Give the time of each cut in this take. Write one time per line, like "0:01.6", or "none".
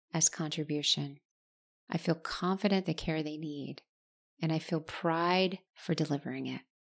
0:02.8
0:05.7